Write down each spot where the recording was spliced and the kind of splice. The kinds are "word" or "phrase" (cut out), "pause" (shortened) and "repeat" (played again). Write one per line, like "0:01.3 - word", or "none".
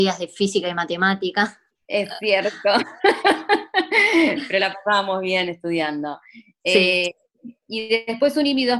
0:01.7 - pause